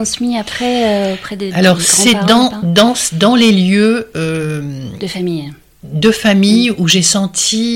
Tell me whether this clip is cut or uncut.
uncut